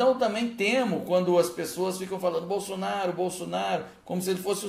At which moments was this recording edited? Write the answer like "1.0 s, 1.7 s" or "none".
none